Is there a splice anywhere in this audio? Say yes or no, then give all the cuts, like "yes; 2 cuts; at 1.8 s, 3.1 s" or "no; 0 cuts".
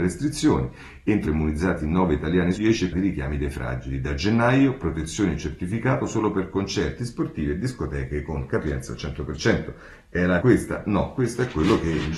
yes; 5 cuts; at 1.3 s, 2.6 s, 2.9 s, 7.0 s, 10.4 s